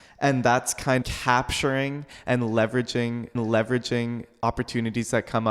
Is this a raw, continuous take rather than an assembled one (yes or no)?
no